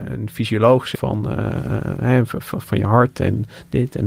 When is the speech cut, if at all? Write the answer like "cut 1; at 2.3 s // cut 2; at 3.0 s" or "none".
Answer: cut 1; at 0.9 s // cut 2; at 2.6 s